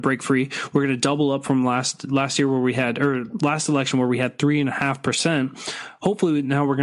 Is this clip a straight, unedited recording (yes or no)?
yes